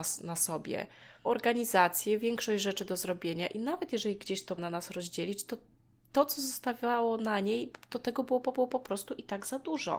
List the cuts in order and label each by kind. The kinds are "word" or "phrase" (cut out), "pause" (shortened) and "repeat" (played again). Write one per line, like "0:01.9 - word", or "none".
0:01.2 - word
0:04.6 - word
0:08.5 - repeat